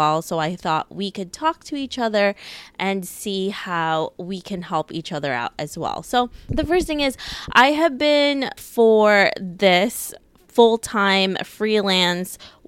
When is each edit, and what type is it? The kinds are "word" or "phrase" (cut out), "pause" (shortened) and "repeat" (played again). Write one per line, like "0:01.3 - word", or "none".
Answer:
0:08.6 - word